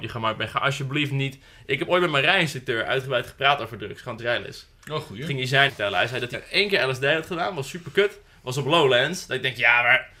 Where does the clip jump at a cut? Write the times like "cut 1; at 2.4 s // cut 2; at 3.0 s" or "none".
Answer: cut 1; at 4.2 s // cut 2; at 5.7 s // cut 3; at 6.3 s